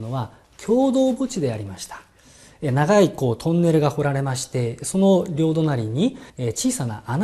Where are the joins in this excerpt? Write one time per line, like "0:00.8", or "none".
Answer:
0:06.3